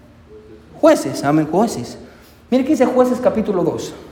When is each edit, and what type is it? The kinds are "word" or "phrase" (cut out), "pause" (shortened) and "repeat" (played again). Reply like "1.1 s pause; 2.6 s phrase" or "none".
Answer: none